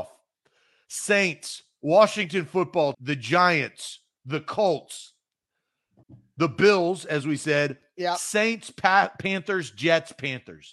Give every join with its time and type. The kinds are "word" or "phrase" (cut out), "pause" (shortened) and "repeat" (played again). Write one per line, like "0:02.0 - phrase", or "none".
0:02.9 - word
0:06.0 - phrase